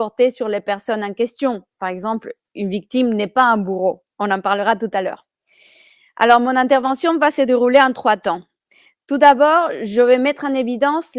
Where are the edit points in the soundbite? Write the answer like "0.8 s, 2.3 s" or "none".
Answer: 4.1 s